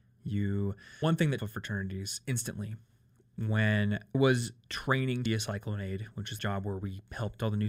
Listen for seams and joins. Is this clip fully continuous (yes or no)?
no